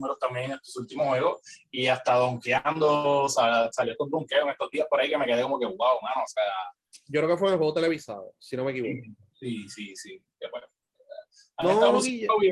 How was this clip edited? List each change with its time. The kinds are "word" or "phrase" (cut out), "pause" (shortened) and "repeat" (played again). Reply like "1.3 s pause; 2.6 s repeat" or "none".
none

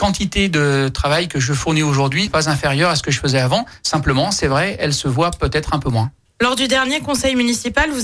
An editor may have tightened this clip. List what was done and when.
2.3 s word

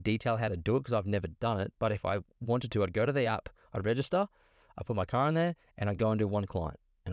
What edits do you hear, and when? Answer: none

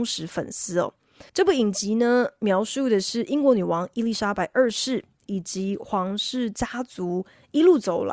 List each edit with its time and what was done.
1.3 s pause

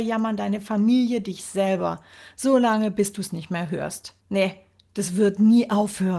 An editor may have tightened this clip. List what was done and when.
4.2 s pause

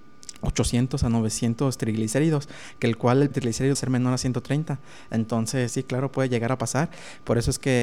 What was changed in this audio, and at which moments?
3.3 s word; 3.7 s word; 5.7 s word

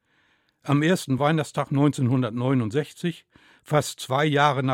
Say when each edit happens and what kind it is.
none

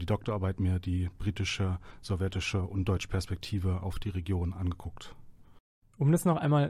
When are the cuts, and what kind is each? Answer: none

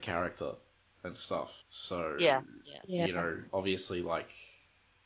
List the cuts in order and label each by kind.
1.6 s pause; 3.5 s pause

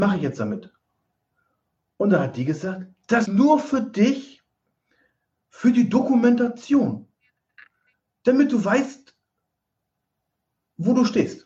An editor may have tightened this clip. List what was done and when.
3.3 s word

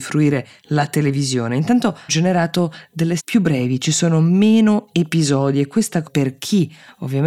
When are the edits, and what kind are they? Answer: 2.1 s word; 3.2 s word; 6.0 s word

